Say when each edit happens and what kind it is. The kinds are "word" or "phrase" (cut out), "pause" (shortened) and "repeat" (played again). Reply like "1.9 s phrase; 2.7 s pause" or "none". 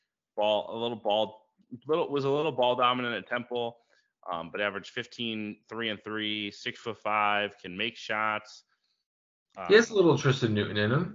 none